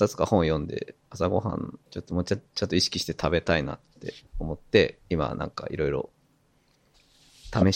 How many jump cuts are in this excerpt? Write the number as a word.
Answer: three